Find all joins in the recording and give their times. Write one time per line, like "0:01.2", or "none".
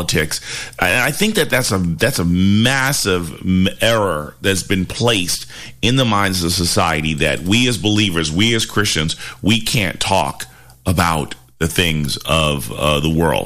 none

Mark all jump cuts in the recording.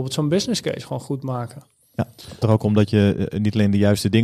0:02.4

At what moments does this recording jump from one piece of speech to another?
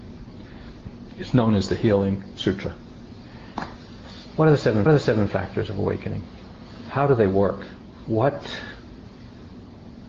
0:04.9

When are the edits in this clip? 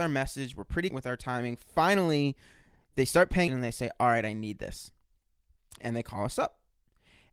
0:00.9
0:03.5
0:05.8

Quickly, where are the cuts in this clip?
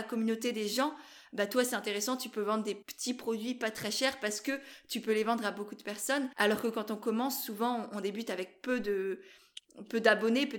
0:02.8
0:06.3

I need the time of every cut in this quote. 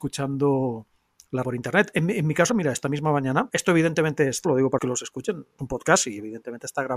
0:01.4
0:02.5
0:03.5
0:04.4
0:04.8
0:05.6

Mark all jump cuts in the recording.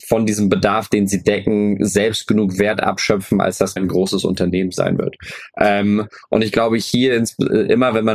0:03.8

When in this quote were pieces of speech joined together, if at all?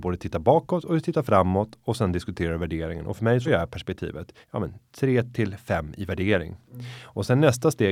0:03.5
0:04.4

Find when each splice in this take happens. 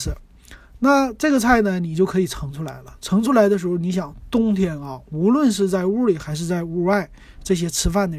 none

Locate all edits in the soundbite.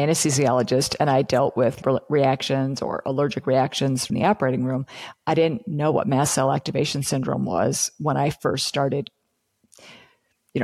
0:01.8
0:04.1

